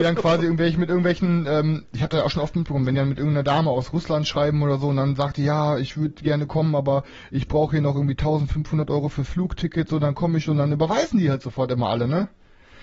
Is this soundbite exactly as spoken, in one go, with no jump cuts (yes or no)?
yes